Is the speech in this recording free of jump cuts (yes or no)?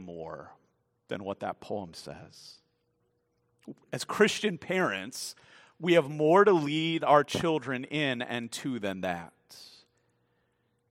yes